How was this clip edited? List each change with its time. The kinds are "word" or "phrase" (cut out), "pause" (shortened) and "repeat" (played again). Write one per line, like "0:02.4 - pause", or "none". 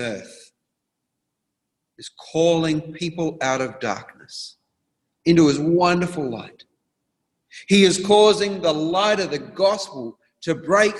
none

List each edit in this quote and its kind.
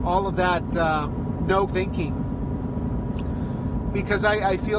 0:01.7 - word

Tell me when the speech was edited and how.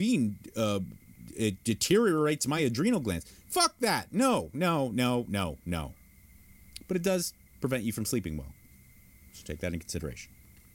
none

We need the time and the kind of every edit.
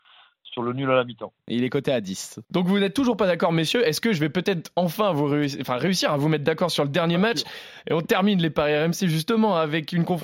0:02.4 - pause

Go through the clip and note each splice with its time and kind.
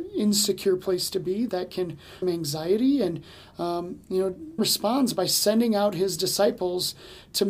0:01.5 - word
0:02.2 - phrase
0:04.6 - word

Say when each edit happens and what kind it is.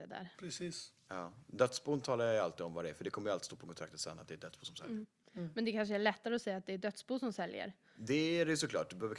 none

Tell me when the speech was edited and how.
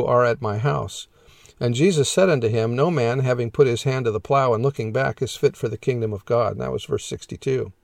none

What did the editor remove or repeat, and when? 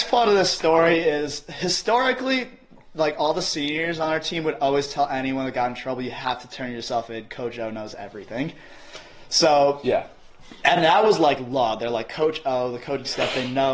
none

